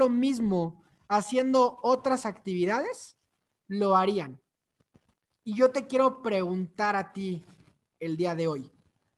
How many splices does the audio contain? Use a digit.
0